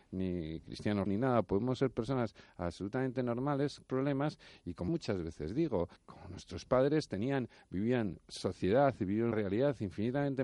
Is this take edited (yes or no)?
yes